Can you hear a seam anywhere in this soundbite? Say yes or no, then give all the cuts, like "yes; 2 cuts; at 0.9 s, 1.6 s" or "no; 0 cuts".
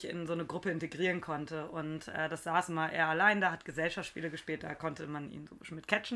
no; 0 cuts